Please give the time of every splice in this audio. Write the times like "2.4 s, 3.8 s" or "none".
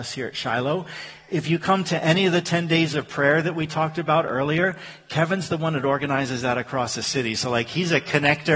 none